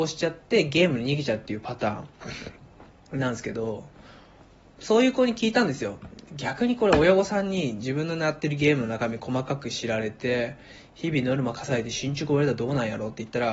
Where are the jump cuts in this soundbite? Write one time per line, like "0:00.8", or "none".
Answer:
none

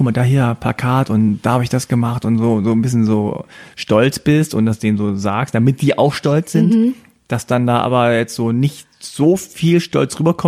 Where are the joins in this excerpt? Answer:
none

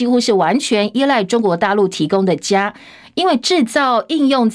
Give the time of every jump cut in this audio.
none

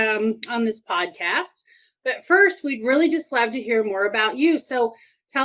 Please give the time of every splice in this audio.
none

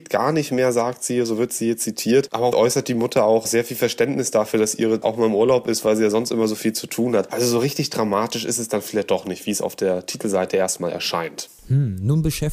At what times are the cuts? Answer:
0:02.5
0:05.0

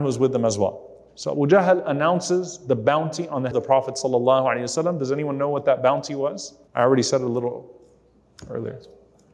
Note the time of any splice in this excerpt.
0:03.5
0:06.7

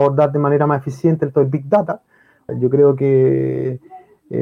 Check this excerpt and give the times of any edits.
0:01.3
0:02.5

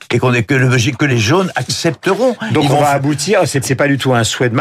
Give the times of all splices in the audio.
0:01.1
0:03.6

